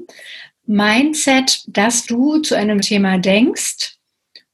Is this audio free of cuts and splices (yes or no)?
no